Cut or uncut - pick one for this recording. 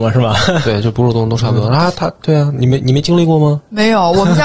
uncut